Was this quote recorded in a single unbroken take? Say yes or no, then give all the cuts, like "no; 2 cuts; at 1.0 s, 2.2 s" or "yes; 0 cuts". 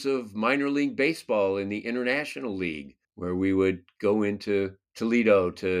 no; 2 cuts; at 3.0 s, 4.8 s